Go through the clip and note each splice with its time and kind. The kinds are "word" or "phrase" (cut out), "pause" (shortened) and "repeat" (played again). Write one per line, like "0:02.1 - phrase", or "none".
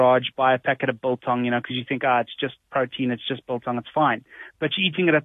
none